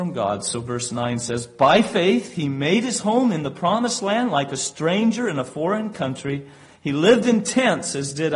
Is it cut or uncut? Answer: uncut